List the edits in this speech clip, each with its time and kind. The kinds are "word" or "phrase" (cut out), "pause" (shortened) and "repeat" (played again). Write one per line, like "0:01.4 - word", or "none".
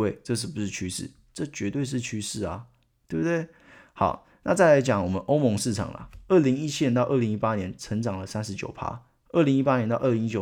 none